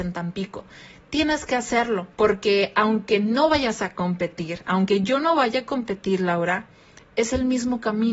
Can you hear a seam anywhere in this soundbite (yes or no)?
yes